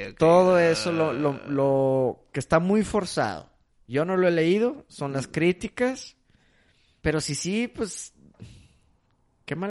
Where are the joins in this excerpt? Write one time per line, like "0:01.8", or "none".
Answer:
none